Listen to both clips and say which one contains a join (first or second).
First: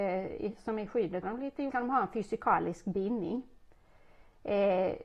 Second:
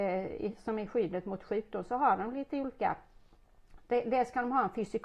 first